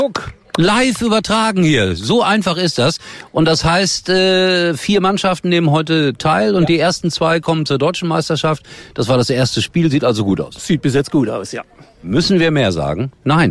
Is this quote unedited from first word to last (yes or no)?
yes